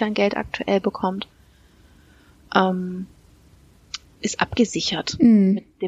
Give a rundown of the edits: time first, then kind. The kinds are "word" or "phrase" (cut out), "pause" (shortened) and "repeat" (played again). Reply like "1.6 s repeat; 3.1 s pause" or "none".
4.0 s word